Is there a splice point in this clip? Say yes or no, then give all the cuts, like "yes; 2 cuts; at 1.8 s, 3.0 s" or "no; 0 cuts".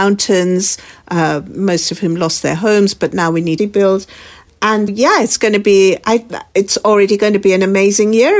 yes; 2 cuts; at 3.6 s, 4.9 s